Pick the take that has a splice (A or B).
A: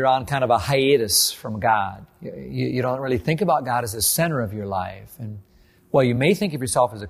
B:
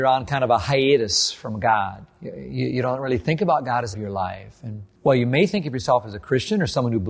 B